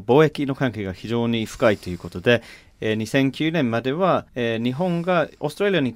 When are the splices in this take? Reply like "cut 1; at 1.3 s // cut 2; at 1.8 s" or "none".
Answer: cut 1; at 4.3 s